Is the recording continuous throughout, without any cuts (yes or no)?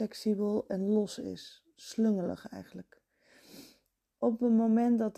yes